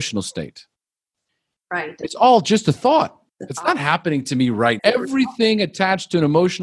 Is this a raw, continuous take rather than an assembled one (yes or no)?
no